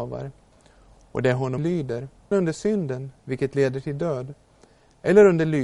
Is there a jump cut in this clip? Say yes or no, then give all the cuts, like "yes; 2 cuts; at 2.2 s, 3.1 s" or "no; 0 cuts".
yes; 2 cuts; at 1.6 s, 2.3 s